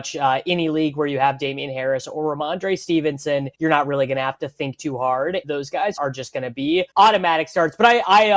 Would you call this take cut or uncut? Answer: cut